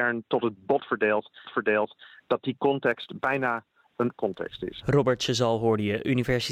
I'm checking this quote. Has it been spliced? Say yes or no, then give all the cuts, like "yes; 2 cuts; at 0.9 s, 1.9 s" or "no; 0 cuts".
yes; 2 cuts; at 1.4 s, 4.1 s